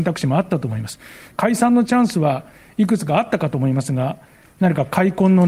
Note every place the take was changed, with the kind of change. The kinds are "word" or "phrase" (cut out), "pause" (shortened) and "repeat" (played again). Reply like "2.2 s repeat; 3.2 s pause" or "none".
none